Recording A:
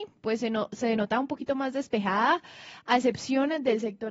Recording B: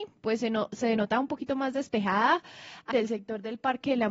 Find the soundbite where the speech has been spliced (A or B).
B